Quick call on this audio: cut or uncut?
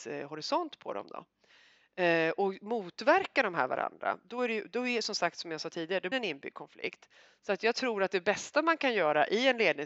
cut